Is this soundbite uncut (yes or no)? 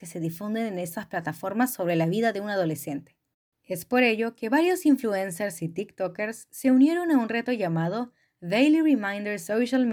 yes